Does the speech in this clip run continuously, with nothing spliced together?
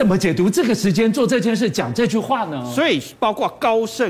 no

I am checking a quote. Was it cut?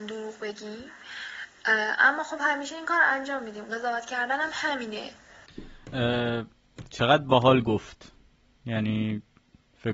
no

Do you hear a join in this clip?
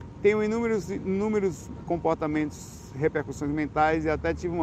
no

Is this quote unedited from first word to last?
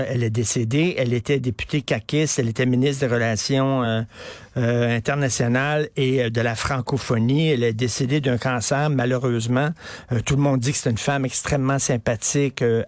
yes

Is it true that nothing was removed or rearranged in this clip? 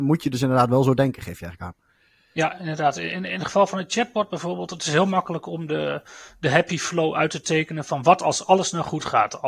yes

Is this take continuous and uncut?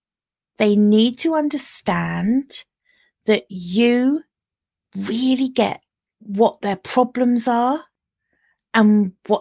yes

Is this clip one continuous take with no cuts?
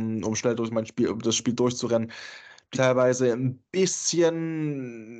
no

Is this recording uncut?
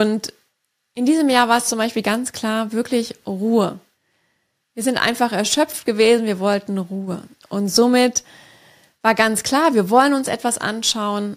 yes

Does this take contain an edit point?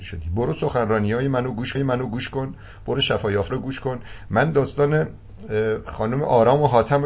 yes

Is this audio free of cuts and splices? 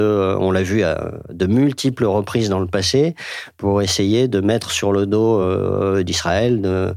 yes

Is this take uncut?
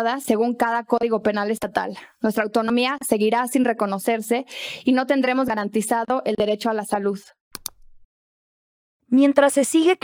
yes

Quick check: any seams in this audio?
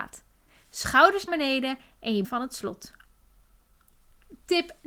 yes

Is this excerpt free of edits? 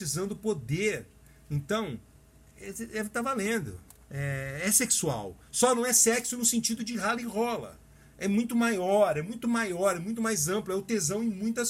no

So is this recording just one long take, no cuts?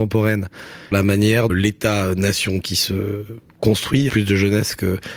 no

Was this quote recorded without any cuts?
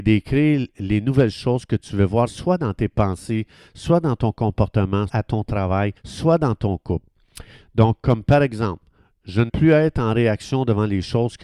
no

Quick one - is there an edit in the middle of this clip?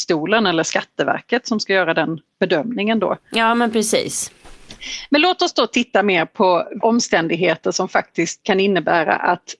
yes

